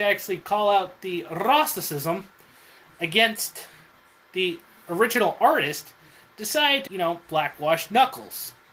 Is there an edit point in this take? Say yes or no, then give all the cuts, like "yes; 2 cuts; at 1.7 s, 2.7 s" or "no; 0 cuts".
yes; 1 cut; at 6.9 s